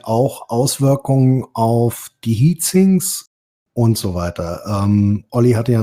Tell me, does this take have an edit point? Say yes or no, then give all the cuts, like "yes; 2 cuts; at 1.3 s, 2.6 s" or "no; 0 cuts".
no; 0 cuts